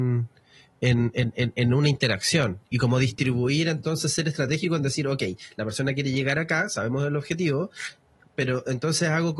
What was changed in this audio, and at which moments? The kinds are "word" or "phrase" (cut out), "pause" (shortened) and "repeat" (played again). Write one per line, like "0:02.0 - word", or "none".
none